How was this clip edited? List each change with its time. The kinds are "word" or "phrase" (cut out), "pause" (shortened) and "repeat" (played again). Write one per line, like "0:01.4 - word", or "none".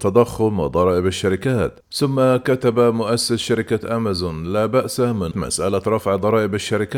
0:01.8 - pause
0:05.3 - word